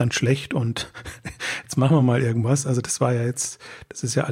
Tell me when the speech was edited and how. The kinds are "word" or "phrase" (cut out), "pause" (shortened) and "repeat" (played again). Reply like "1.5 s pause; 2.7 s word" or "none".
none